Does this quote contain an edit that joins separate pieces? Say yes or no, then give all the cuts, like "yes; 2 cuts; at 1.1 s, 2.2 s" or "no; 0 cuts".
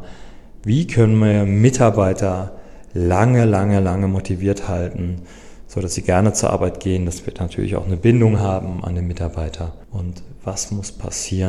no; 0 cuts